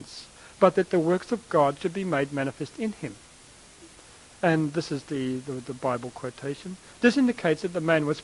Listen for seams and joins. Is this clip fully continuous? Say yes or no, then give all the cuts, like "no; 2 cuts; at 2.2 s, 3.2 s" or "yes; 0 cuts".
yes; 0 cuts